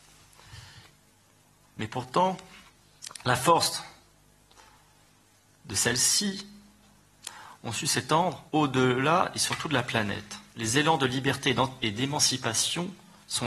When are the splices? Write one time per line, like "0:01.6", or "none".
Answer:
0:08.5
0:10.5